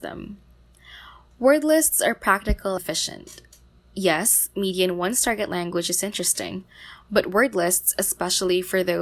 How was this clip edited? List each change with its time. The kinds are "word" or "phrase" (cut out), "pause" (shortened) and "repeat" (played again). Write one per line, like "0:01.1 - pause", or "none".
0:02.8 - word